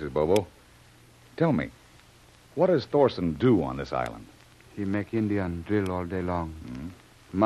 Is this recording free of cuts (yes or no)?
yes